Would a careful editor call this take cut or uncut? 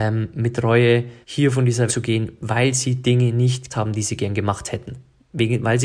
cut